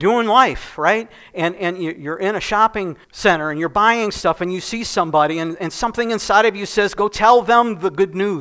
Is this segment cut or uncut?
cut